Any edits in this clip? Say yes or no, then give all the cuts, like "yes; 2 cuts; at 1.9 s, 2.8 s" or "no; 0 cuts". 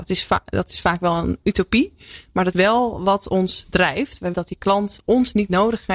yes; 2 cuts; at 2.5 s, 4.3 s